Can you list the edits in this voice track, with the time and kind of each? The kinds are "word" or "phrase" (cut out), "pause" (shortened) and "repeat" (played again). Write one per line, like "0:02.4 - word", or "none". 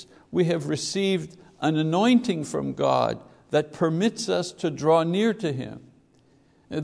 none